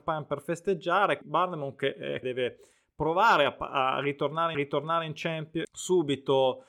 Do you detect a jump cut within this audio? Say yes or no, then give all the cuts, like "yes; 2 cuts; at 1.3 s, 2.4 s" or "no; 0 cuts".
yes; 4 cuts; at 1.2 s, 2.2 s, 4.5 s, 5.6 s